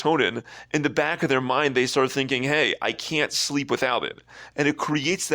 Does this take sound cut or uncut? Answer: uncut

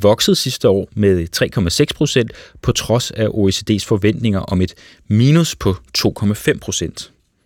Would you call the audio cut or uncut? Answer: uncut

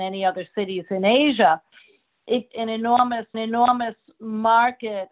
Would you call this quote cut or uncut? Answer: cut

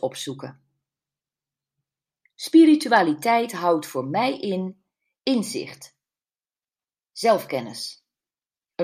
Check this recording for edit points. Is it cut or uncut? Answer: uncut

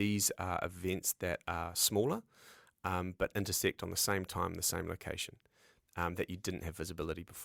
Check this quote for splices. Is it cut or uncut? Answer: uncut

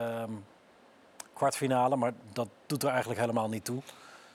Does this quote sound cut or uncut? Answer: uncut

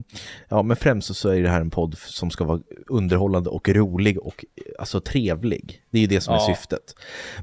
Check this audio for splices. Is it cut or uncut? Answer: uncut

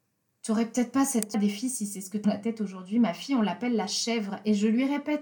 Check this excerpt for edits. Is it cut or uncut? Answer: cut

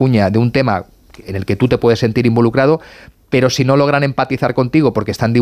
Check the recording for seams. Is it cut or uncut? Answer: uncut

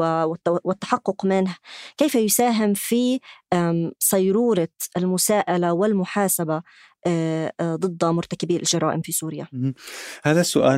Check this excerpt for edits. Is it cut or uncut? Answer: uncut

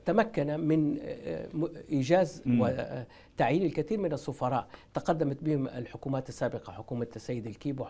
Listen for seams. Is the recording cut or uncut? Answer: cut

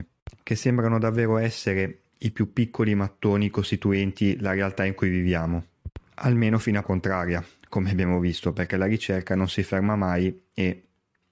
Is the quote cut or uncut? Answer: cut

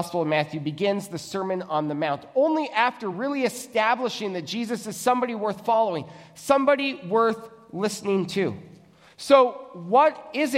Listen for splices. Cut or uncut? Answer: uncut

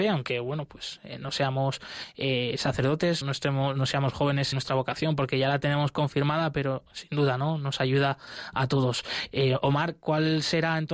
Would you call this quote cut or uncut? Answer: cut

